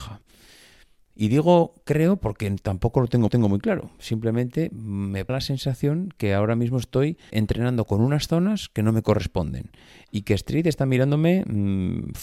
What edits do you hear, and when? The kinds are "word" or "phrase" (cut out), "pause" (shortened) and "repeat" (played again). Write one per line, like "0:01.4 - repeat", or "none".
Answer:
0:03.3 - repeat
0:05.3 - word
0:07.3 - word